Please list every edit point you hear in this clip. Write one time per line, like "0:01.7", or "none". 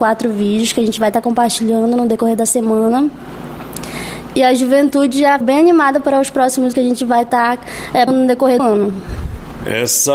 0:05.4
0:06.7
0:08.1
0:08.6

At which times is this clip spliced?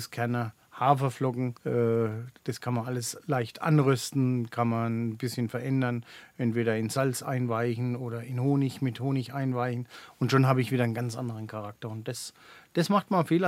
0:01.6

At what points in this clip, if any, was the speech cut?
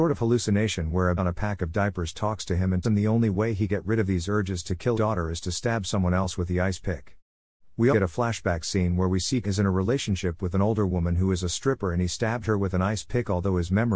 0:01.2
0:02.8
0:03.7
0:04.9
0:07.9
0:09.4

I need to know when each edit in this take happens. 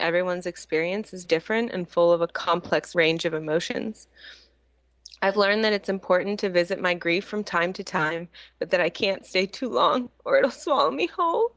0:01.2

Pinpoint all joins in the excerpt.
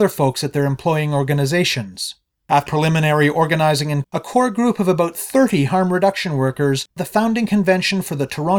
0:02.7
0:04.0
0:07.0

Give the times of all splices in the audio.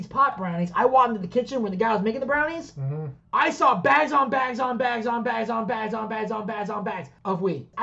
none

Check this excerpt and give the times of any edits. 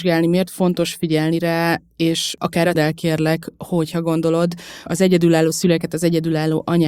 0:02.7
0:04.9

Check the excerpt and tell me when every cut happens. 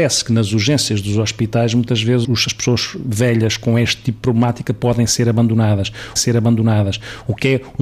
0:02.2
0:06.2

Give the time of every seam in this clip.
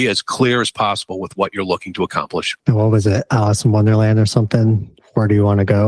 0:02.6

